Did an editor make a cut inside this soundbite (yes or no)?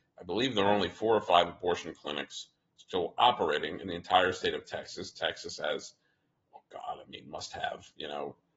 no